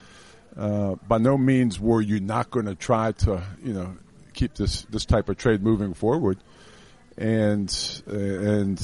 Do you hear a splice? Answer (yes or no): no